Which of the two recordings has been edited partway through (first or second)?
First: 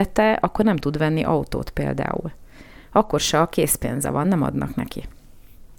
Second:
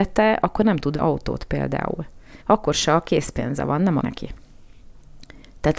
second